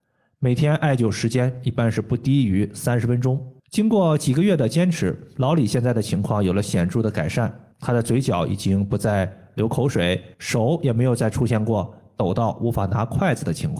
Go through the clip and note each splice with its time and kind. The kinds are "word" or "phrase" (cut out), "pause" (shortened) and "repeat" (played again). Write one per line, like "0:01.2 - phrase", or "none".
0:03.6 - pause
0:07.7 - pause
0:10.3 - pause

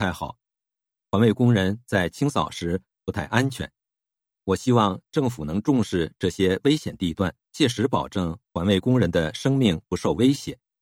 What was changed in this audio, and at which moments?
0:07.4 - pause

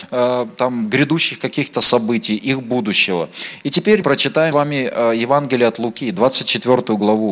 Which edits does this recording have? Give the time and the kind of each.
0:04.0 - word
0:04.5 - word

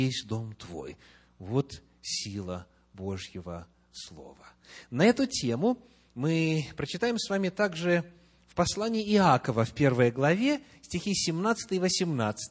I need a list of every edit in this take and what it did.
none

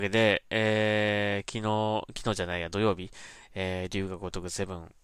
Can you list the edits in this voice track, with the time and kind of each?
none

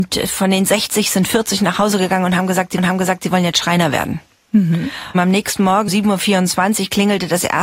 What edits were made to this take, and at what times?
0:02.8 - repeat
0:05.9 - word

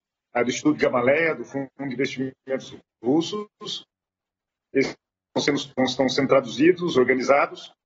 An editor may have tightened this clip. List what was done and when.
none

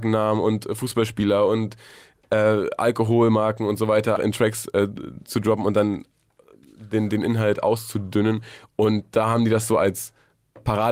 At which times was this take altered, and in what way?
0:04.2 - word

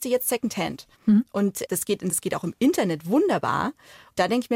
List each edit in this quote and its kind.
0:00.9 - pause
0:01.6 - word
0:02.1 - word

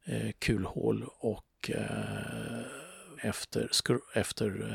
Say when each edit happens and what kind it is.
0:03.2 - word

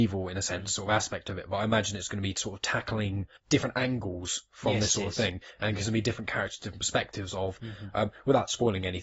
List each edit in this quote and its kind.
0:03.4 - pause

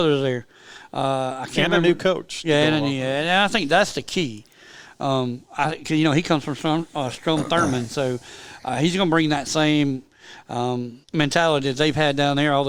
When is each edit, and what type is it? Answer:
0:11.0 - pause

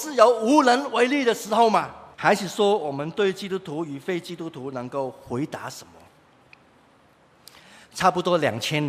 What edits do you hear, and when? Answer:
0:02.1 - pause

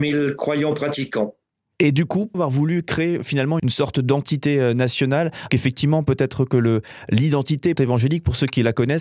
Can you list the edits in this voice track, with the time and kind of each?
0:02.3 - word
0:03.6 - word
0:05.5 - word
0:07.8 - word

